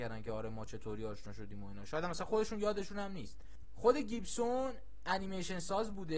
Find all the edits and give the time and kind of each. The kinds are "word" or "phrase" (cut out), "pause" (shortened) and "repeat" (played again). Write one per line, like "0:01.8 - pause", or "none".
none